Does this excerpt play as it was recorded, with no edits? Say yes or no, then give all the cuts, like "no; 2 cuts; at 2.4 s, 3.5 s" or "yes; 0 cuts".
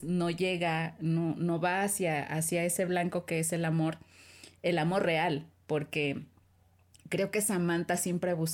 yes; 0 cuts